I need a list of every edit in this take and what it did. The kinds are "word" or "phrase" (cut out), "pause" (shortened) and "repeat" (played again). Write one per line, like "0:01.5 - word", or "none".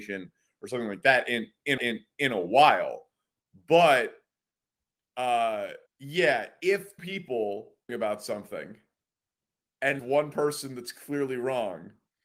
0:01.8 - repeat
0:05.9 - pause
0:07.0 - word
0:07.9 - phrase
0:10.0 - word